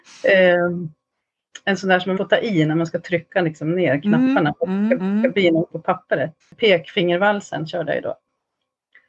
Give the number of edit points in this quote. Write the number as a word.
four